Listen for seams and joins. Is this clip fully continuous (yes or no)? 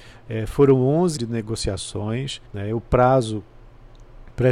no